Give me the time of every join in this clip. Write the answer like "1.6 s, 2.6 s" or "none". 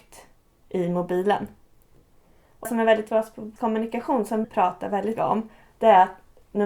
2.6 s, 3.1 s, 3.6 s, 4.4 s, 5.2 s

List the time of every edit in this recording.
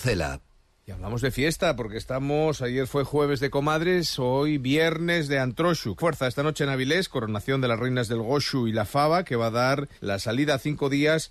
6.0 s, 10.0 s

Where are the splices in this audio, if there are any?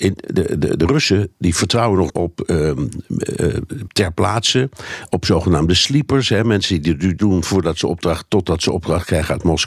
2.1 s, 3.9 s, 7.2 s

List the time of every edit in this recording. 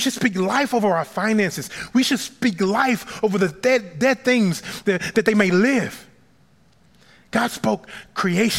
none

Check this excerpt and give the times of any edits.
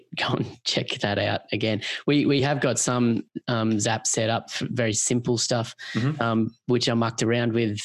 none

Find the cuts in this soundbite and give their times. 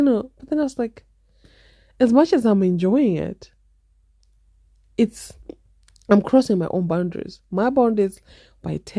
none

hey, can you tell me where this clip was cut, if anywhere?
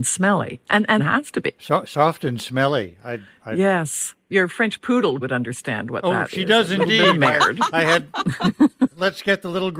1.0 s, 5.2 s

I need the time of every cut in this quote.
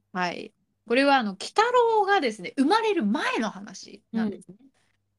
4.1 s

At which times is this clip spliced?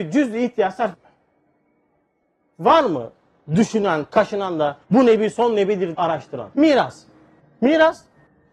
0.9 s, 4.1 s, 4.8 s, 5.9 s, 6.5 s

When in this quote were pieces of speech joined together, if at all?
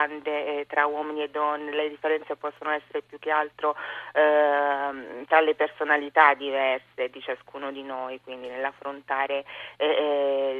none

